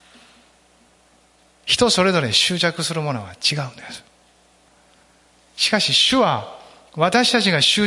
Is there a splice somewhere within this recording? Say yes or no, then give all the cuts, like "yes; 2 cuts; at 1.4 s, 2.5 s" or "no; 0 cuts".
no; 0 cuts